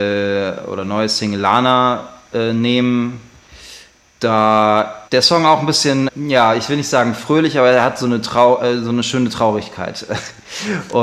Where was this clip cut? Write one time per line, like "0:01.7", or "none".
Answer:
0:05.1
0:06.1